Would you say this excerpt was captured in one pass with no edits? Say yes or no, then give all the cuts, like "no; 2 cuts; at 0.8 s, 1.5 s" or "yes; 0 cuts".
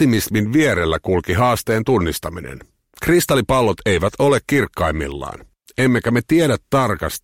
yes; 0 cuts